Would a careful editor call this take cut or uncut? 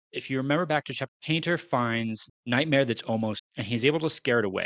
cut